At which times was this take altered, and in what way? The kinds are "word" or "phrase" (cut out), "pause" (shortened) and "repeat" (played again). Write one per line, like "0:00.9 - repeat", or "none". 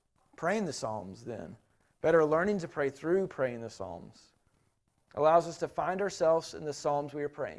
none